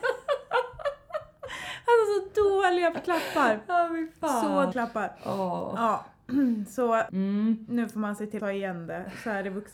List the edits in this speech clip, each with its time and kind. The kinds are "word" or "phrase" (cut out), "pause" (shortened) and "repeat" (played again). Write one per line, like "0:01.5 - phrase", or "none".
0:04.7 - word
0:07.1 - word
0:08.4 - word